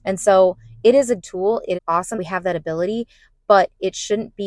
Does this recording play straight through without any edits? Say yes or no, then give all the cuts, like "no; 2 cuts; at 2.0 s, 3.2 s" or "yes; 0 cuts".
no; 3 cuts; at 1.2 s, 1.7 s, 2.1 s